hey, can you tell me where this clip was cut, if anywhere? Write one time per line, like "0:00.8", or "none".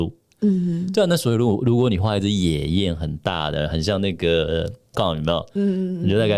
0:04.9

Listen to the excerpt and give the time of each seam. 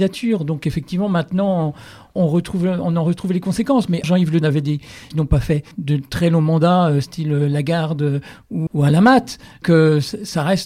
0:02.2
0:04.0
0:04.4
0:05.1
0:05.7
0:08.7
0:09.6

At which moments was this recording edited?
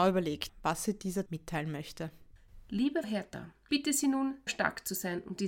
0:01.3
0:03.0
0:03.7
0:04.5

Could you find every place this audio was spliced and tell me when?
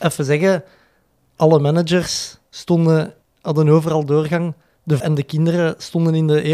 0:03.2
0:05.0

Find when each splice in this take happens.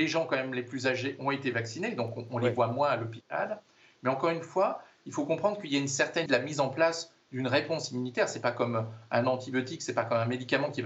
0:06.3

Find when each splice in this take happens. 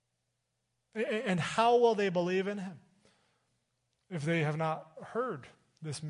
none

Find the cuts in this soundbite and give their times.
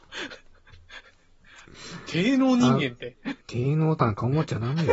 0:03.4

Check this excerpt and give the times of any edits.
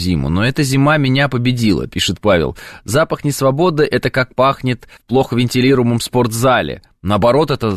0:05.0

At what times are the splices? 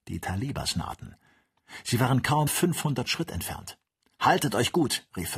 0:02.5
0:04.0

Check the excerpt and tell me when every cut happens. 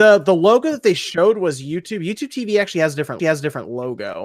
0:03.2

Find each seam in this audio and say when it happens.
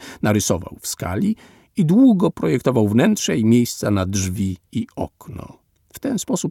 none

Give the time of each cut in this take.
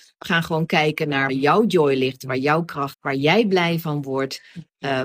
0:01.3
0:02.9

